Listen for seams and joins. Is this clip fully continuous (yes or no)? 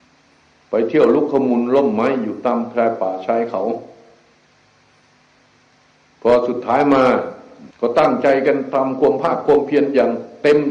no